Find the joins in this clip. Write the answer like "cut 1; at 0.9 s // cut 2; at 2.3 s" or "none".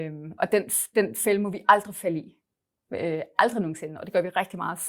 none